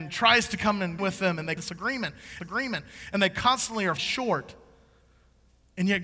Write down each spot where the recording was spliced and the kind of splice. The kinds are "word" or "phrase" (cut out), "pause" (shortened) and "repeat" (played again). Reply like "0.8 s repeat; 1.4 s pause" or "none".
1.0 s word; 1.6 s phrase; 2.4 s repeat; 4.0 s word